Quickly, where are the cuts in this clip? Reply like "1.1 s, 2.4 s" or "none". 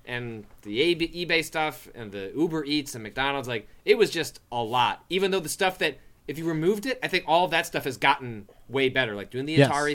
none

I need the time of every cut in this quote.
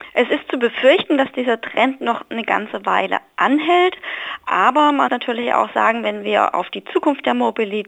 5.1 s

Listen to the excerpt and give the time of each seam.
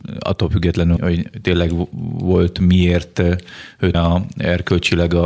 1.0 s, 3.9 s

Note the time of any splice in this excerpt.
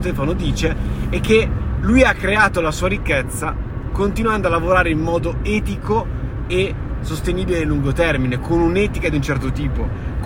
none

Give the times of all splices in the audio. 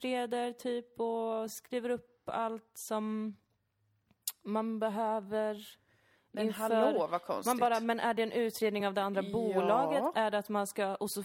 none

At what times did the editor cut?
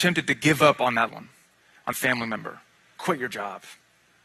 1.1 s, 1.9 s, 3.0 s

